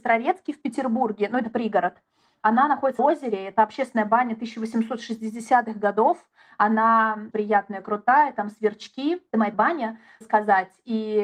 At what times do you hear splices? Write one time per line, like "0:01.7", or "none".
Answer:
0:03.0
0:07.3
0:09.5
0:10.2